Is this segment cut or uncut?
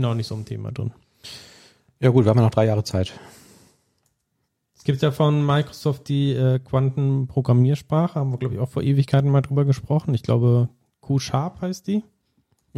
uncut